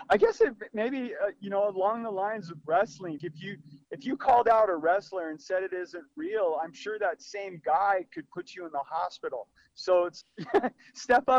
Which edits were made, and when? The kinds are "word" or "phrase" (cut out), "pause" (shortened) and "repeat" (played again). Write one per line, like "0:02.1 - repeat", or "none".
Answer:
0:03.2 - word
0:10.2 - word